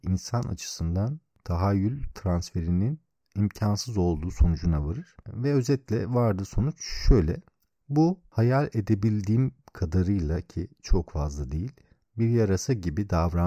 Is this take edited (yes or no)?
no